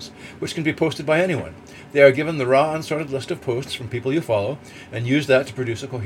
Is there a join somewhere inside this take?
no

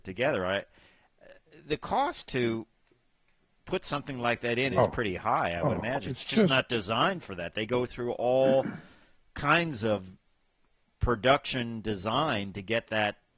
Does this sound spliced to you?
yes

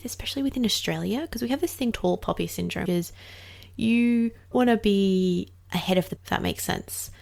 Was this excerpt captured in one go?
no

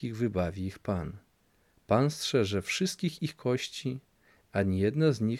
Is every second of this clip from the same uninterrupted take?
yes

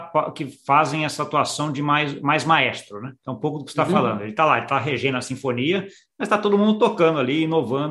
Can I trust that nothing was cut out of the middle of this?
yes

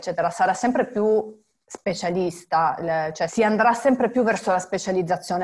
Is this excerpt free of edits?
yes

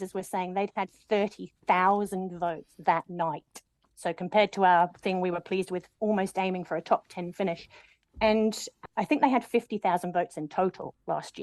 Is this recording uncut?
no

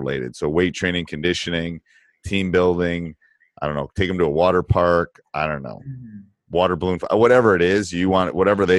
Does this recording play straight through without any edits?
yes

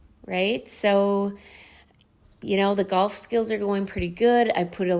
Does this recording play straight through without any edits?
yes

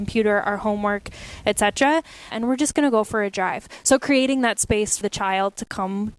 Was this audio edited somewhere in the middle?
yes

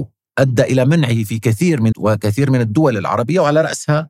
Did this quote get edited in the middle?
yes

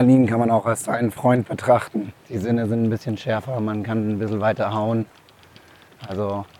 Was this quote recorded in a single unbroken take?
no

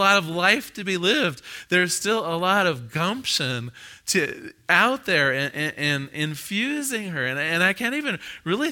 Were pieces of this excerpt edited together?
no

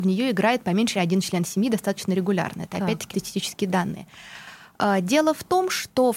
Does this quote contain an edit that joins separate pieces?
yes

